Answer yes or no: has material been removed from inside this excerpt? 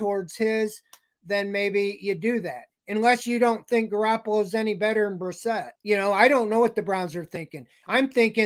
yes